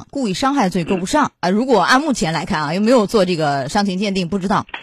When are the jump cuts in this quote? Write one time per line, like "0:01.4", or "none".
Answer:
0:01.4

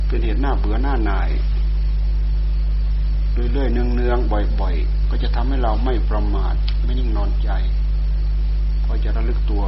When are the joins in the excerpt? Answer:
0:05.0

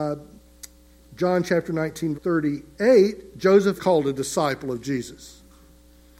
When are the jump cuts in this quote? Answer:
0:02.1
0:03.8

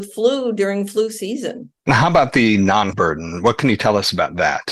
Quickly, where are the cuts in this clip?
0:01.8
0:02.9

